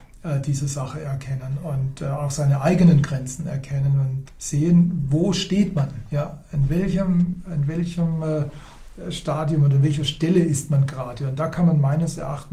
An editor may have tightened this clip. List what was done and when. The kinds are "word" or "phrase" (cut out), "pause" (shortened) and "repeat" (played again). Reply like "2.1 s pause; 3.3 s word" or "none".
4.3 s word